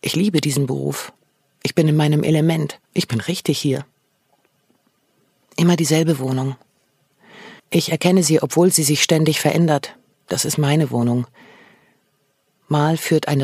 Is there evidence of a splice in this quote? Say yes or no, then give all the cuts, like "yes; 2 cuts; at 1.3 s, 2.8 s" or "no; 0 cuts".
yes; 4 cuts; at 1.2 s, 2.8 s, 7.6 s, 10.1 s